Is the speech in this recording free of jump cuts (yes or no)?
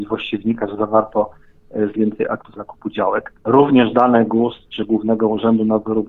no